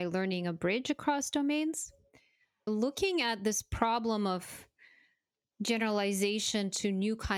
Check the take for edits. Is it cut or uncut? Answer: cut